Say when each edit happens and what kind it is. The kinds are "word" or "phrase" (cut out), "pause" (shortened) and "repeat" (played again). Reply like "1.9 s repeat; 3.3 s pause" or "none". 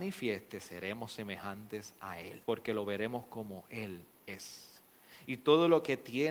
2.4 s pause; 4.1 s pause